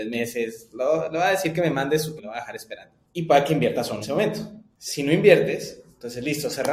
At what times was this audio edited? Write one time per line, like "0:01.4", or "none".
0:02.2
0:04.0